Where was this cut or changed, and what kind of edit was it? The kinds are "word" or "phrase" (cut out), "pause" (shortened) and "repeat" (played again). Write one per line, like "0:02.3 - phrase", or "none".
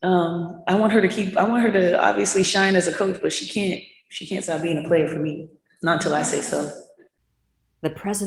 none